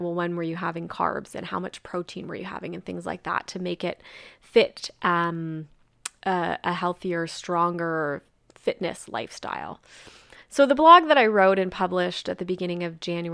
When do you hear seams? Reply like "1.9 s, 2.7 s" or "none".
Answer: none